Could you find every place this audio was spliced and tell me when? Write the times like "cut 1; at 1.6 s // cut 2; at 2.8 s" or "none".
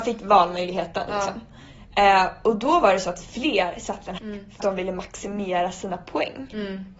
cut 1; at 4.2 s // cut 2; at 4.6 s